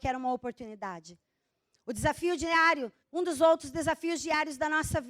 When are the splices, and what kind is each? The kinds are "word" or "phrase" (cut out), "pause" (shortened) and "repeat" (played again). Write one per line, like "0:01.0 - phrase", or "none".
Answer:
0:03.0 - pause